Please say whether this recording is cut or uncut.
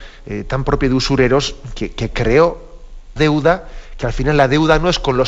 cut